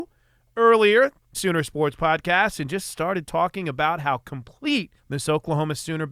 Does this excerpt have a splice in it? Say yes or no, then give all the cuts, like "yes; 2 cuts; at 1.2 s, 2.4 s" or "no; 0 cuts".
yes; 2 cuts; at 1.3 s, 5.0 s